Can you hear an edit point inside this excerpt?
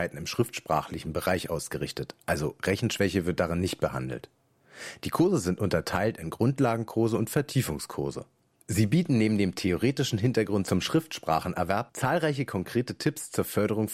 no; 0 cuts

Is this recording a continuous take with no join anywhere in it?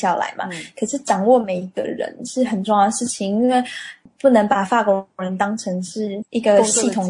yes; 0 cuts

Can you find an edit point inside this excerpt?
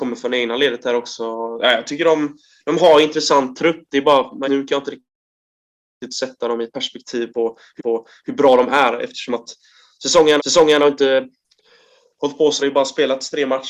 yes; 4 cuts; at 4.4 s, 7.8 s, 10.4 s, 12.6 s

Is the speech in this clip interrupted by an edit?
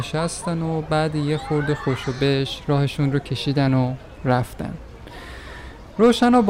no; 0 cuts

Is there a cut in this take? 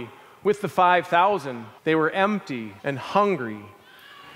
yes; 2 cuts; at 1.8 s, 2.8 s

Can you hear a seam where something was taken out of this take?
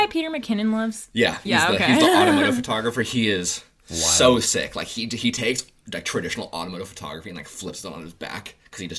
no; 0 cuts

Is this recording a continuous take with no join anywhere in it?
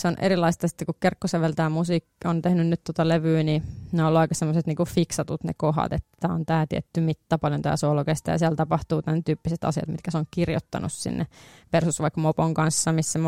yes; 0 cuts

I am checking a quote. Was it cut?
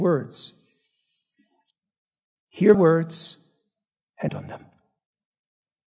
yes; 2 cuts; at 2.7 s, 4.3 s

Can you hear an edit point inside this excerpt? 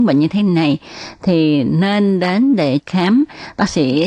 yes; 1 cut; at 2.8 s

